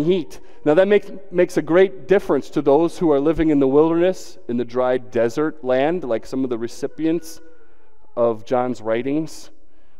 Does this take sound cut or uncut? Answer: uncut